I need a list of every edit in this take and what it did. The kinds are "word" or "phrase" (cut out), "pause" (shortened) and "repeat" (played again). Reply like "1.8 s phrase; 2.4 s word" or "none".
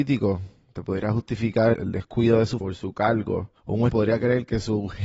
1.7 s word; 2.6 s word; 3.6 s pause; 3.9 s word